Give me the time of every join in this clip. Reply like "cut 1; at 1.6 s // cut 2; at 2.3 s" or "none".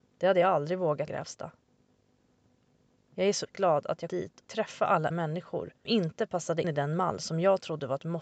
cut 1; at 1.1 s // cut 2; at 3.5 s // cut 3; at 4.1 s // cut 4; at 4.4 s // cut 5; at 5.1 s // cut 6; at 5.9 s // cut 7; at 6.6 s

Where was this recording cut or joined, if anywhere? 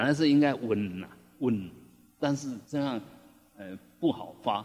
cut 1; at 2.6 s

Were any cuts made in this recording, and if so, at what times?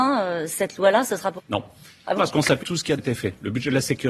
cut 1; at 1.4 s // cut 2; at 2.2 s // cut 3; at 2.6 s // cut 4; at 3.0 s

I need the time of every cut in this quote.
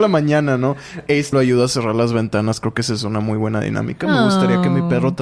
cut 1; at 1.3 s

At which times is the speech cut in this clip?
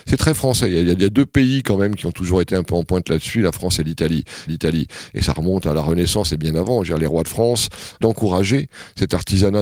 cut 1; at 4.5 s // cut 2; at 8.0 s

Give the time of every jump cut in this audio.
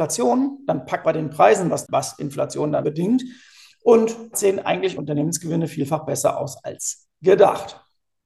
cut 1; at 1.0 s // cut 2; at 1.8 s // cut 3; at 2.8 s // cut 4; at 4.3 s // cut 5; at 5.0 s

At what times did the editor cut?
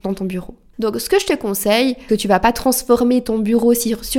cut 1; at 2.1 s

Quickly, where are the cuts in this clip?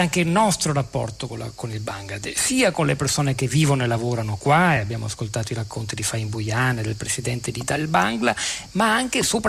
none

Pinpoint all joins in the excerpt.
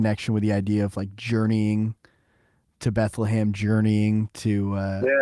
none

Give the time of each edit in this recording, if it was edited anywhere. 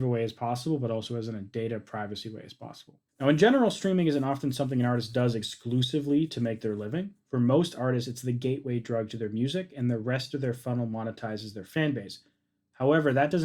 cut 1; at 3.1 s

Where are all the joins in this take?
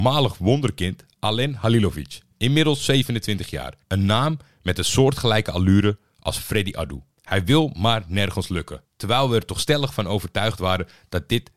cut 1; at 3.8 s // cut 2; at 7.1 s // cut 3; at 8.8 s

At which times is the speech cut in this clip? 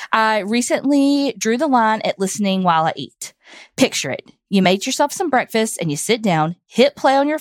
none

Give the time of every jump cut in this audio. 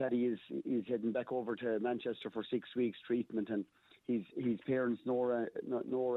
none

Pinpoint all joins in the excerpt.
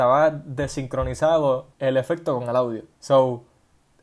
cut 1; at 1.7 s // cut 2; at 2.9 s

